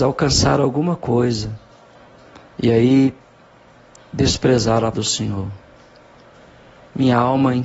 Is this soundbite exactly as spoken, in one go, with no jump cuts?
no; 1 cut; at 4.9 s

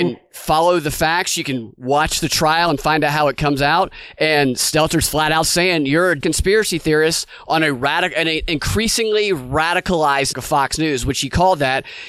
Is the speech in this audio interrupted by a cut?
yes; 2 cuts; at 6.2 s, 10.3 s

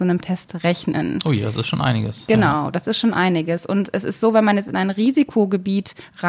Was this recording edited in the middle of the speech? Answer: no; 0 cuts

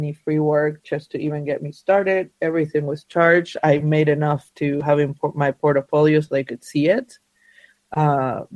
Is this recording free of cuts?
yes; 0 cuts

